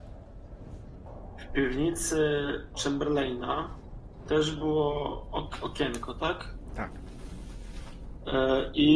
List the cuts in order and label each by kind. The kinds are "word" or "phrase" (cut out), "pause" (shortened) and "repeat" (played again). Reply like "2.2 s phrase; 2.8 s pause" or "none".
none